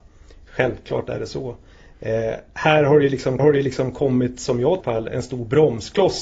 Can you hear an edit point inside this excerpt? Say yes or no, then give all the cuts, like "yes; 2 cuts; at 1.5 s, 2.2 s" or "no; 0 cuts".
yes; 2 cuts; at 3.4 s, 4.8 s